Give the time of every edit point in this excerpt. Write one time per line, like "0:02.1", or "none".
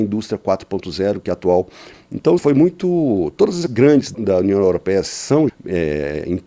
0:02.4
0:03.7
0:04.1
0:05.5

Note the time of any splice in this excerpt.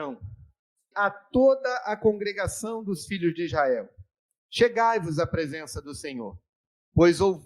0:00.9

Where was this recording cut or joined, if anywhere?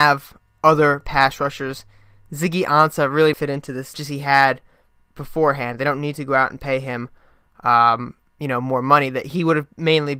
0:03.3
0:03.9

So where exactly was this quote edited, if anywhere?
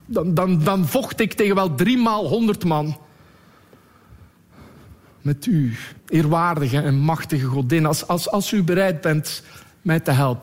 0:06.0

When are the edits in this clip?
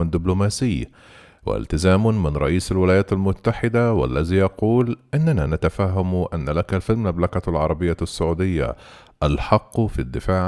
none

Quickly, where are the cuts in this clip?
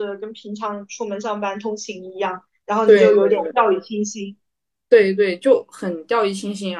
none

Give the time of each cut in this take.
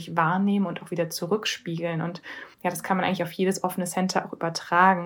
0:02.5

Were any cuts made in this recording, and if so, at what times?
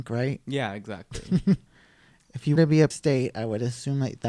0:01.7
0:02.6
0:02.9

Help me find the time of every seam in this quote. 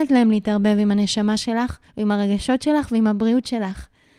0:01.9

